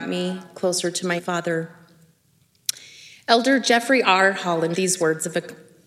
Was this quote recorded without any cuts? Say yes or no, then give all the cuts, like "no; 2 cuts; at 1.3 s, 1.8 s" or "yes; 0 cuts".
no; 2 cuts; at 1.2 s, 4.7 s